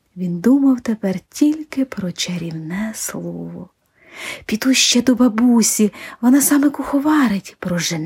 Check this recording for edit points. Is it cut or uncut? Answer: uncut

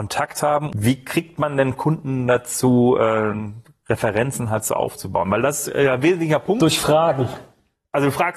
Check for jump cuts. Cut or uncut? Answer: uncut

